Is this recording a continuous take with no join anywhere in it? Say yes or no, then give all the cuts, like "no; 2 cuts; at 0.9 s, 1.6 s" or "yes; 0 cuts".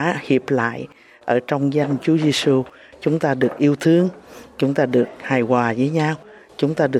yes; 0 cuts